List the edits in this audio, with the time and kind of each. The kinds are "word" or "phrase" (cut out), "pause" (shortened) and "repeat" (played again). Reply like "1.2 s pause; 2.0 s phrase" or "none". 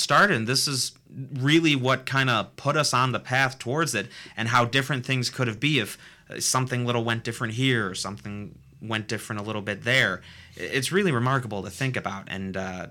none